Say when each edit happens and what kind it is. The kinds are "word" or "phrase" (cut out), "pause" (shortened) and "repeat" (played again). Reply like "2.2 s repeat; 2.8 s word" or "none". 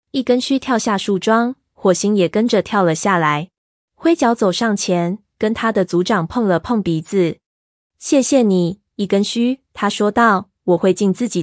3.6 s pause; 7.5 s pause

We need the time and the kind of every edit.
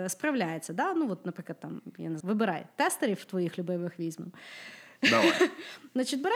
2.2 s word

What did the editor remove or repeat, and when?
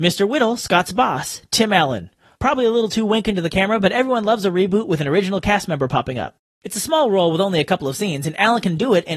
none

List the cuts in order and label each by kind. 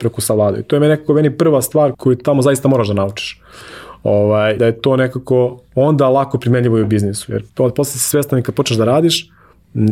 1.9 s word; 4.6 s word; 7.5 s pause

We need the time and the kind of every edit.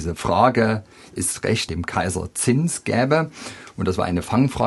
1.7 s phrase

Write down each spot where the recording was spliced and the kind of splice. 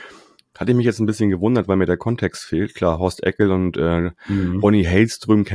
none

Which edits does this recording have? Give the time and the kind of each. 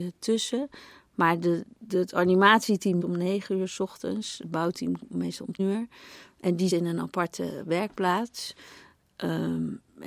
1.9 s word; 3.0 s word; 5.6 s word; 6.7 s word

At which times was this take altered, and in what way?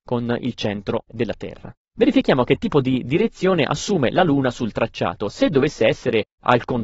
none

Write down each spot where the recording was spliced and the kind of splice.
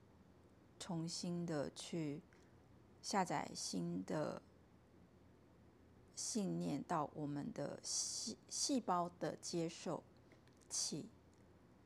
6.1 s pause

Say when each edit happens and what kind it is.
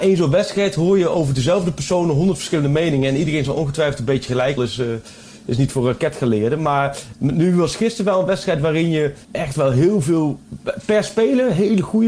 4.6 s phrase; 9.2 s pause

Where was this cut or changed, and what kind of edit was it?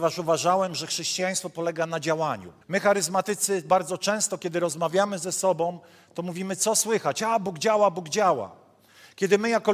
2.6 s pause

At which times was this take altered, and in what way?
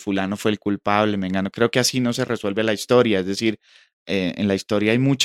none

